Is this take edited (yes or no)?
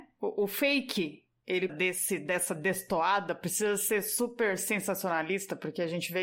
yes